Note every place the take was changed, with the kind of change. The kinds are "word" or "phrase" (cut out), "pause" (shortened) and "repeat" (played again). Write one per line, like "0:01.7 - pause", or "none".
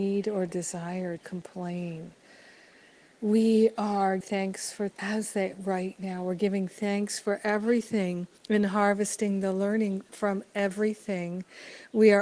0:01.2 - word
0:04.2 - word
0:04.9 - word
0:05.5 - word
0:08.4 - pause